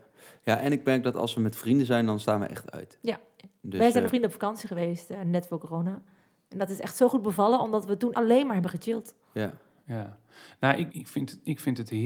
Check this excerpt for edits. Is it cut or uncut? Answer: cut